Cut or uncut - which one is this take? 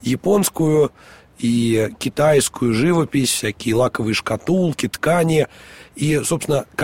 uncut